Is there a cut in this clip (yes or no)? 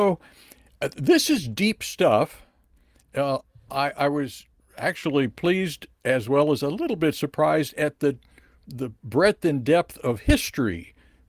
no